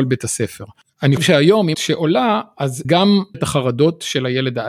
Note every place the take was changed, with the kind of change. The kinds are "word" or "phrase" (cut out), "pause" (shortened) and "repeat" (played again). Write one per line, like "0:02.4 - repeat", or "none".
0:01.2 - word
0:01.7 - word
0:02.8 - word
0:03.3 - word